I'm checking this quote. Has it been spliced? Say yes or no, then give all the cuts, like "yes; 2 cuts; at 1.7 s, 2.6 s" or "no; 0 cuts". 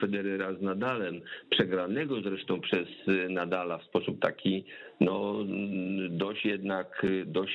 no; 0 cuts